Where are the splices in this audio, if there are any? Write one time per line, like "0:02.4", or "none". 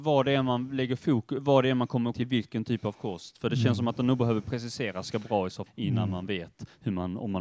0:02.1
0:05.1
0:05.7